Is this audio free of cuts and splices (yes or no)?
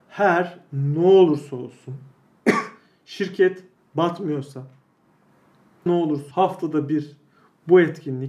no